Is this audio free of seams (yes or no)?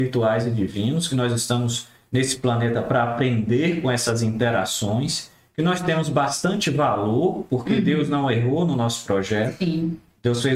yes